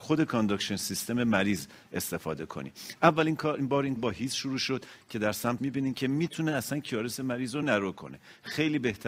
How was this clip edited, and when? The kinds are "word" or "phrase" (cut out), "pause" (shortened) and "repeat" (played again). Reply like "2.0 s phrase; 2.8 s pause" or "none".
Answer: 4.0 s word; 5.6 s word; 7.6 s word